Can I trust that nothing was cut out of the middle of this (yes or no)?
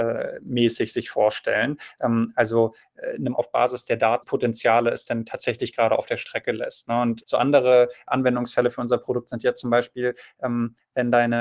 no